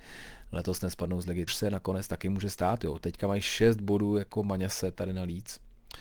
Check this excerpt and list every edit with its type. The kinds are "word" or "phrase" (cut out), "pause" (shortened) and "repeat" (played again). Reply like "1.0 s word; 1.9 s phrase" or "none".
1.5 s word